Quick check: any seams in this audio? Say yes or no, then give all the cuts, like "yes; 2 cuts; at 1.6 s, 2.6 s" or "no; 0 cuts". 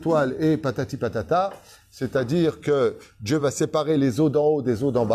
no; 0 cuts